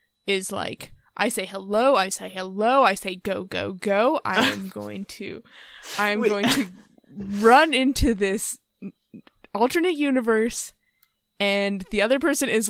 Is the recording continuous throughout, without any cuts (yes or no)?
yes